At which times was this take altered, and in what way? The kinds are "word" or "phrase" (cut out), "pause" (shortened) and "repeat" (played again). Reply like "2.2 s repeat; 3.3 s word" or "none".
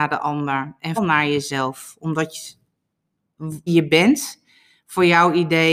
1.0 s word; 3.7 s word